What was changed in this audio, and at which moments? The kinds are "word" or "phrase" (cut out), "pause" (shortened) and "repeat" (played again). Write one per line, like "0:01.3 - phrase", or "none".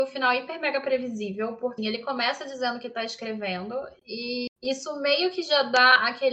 0:01.8 - word
0:04.5 - pause